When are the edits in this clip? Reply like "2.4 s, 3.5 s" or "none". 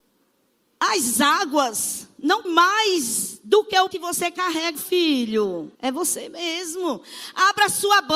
2.4 s, 3.9 s, 4.7 s, 5.7 s